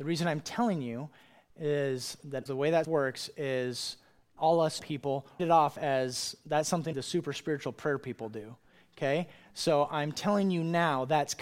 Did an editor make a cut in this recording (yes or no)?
yes